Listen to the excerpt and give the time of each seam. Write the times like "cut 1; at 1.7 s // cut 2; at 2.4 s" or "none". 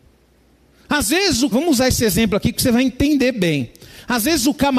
cut 1; at 1.5 s